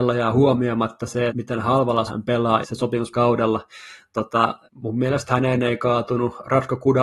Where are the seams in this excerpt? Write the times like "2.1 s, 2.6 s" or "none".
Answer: 1.3 s, 2.1 s, 2.6 s, 3.1 s, 4.6 s